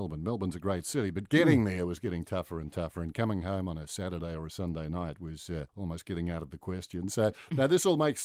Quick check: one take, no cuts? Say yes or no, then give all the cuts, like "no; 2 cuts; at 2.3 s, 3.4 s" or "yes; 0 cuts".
no; 1 cut; at 5.7 s